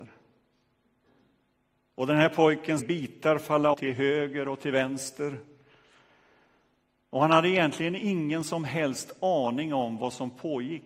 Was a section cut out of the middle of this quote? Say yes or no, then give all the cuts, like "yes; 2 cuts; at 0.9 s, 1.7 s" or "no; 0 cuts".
yes; 2 cuts; at 2.8 s, 3.7 s